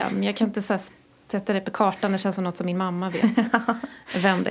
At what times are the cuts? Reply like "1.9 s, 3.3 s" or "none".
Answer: none